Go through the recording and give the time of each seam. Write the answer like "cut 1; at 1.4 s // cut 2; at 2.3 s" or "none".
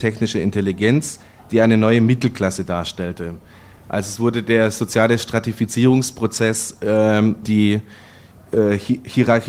cut 1; at 7.4 s